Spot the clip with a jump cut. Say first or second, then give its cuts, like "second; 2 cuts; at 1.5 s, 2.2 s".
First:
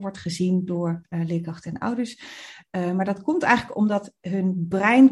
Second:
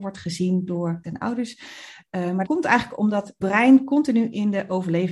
second; 3 cuts; at 1.0 s, 2.4 s, 3.4 s